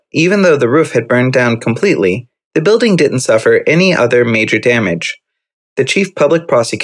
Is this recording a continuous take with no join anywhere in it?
yes; 0 cuts

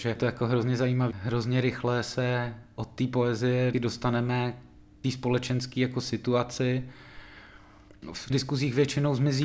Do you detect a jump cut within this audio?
yes; 4 cuts; at 1.1 s, 3.7 s, 5.0 s, 8.3 s

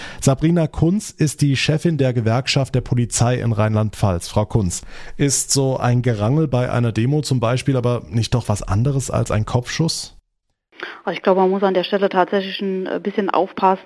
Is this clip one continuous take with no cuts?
yes; 0 cuts

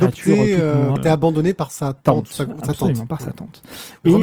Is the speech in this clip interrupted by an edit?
yes; 2 cuts; at 1.0 s, 2.0 s

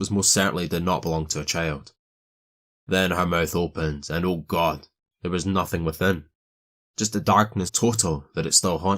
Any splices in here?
yes; 1 cut; at 7.7 s

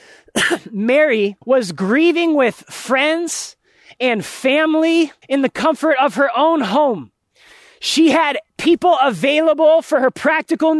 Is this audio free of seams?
no; 3 cuts; at 1.4 s, 5.2 s, 8.5 s

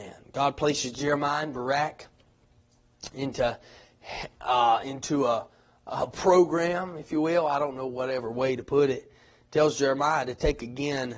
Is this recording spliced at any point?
no; 0 cuts

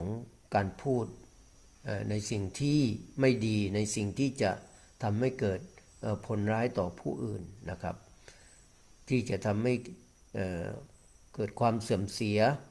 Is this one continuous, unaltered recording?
yes; 0 cuts

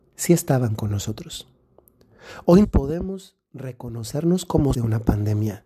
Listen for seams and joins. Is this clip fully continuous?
no; 2 cuts; at 2.6 s, 4.7 s

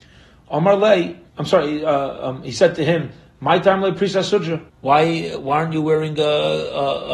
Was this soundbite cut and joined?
yes; 2 cuts; at 1.3 s, 4.7 s

